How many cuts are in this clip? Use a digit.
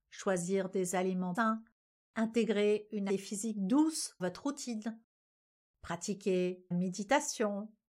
4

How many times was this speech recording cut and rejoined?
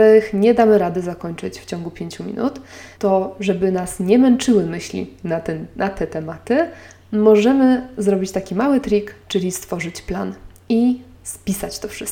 1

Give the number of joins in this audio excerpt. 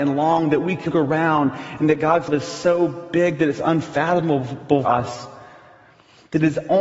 3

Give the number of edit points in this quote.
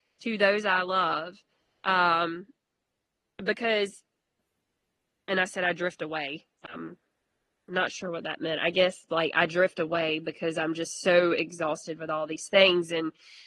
0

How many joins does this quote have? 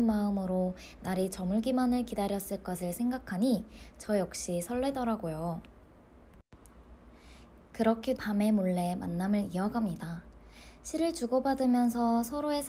1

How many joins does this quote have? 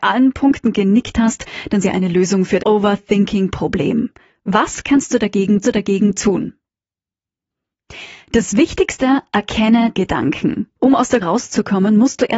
6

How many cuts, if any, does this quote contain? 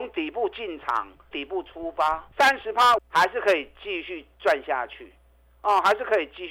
3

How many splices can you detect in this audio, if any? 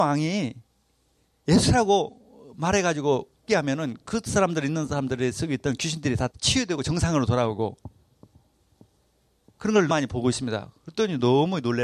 3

